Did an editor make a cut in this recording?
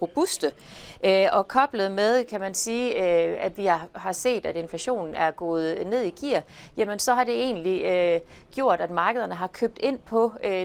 no; 0 cuts

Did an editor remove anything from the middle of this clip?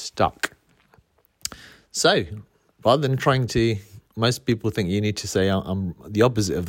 no; 0 cuts

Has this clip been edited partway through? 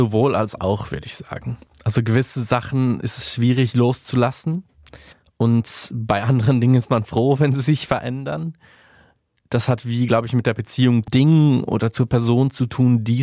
yes; 2 cuts; at 5.1 s, 11.1 s

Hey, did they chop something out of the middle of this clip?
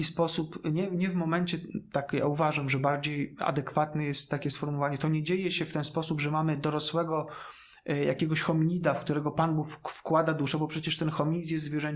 no; 0 cuts

